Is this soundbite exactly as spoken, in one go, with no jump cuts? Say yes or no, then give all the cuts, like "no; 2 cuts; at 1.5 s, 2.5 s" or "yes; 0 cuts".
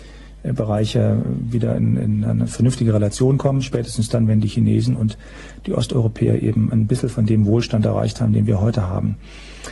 yes; 0 cuts